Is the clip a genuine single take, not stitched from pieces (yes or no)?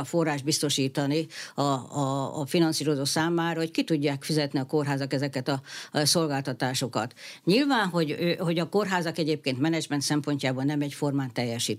no